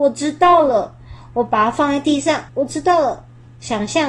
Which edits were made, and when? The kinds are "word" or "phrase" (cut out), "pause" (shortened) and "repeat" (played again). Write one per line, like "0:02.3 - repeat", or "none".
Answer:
0:02.5 - pause